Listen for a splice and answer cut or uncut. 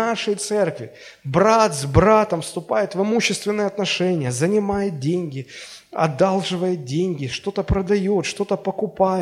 uncut